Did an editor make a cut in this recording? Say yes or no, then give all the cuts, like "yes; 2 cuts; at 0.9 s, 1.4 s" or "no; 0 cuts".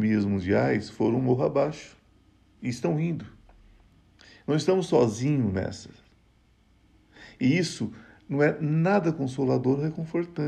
no; 0 cuts